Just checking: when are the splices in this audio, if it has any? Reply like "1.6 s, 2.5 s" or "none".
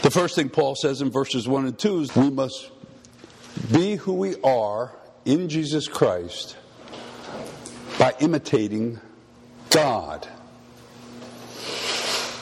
2.1 s